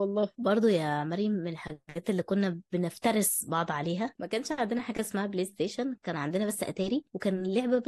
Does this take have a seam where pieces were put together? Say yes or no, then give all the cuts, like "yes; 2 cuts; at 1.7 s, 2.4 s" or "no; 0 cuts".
no; 0 cuts